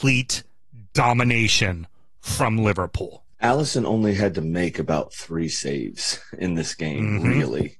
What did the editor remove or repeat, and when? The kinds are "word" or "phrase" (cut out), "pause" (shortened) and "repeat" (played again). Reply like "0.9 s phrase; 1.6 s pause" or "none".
3.3 s pause